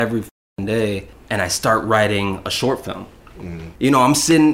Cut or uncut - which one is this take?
uncut